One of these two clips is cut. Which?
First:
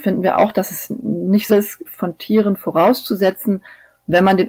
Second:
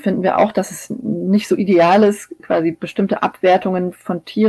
first; 2 cuts; at 1.5 s, 1.9 s

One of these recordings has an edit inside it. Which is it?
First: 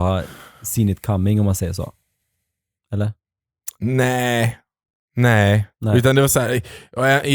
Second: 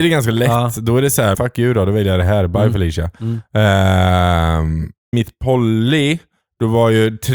second; 3 cuts; at 1.3 s, 5.1 s, 6.4 s

